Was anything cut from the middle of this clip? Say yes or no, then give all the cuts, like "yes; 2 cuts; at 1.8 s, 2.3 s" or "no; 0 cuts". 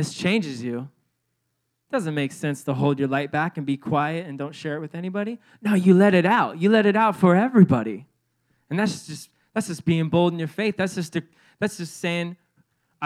no; 0 cuts